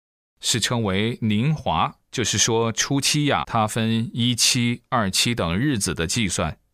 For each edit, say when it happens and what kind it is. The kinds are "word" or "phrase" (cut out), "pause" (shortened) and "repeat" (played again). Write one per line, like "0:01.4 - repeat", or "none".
0:02.0 - pause
0:03.4 - word